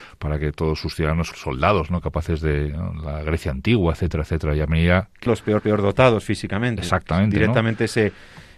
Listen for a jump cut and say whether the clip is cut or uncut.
cut